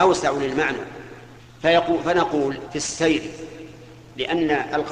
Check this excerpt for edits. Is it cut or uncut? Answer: cut